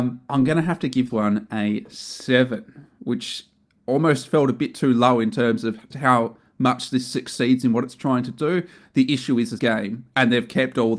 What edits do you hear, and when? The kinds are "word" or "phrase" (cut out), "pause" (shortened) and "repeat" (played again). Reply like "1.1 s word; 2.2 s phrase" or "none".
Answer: 1.1 s word; 5.9 s word; 9.6 s phrase